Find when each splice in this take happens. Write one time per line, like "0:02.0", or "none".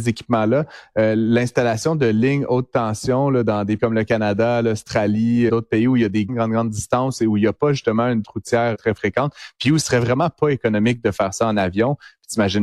0:03.8
0:05.5
0:06.3
0:08.2
0:08.7
0:09.8